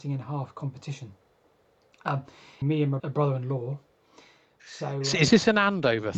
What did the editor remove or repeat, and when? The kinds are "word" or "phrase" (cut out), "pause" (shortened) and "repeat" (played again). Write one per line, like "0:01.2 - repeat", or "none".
0:02.6 - phrase
0:03.0 - word